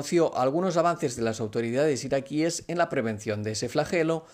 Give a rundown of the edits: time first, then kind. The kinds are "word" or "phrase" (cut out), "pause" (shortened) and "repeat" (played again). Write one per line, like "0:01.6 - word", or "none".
none